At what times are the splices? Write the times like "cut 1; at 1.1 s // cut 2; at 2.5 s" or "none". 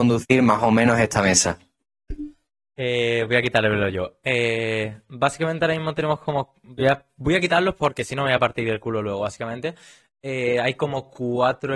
none